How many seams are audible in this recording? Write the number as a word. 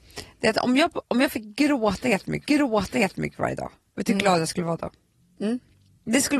one